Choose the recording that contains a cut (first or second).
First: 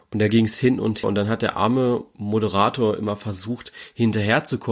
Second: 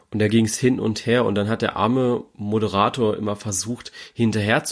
first